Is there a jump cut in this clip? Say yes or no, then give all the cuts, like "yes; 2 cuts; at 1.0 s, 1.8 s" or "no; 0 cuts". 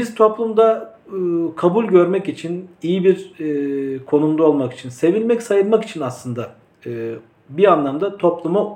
no; 0 cuts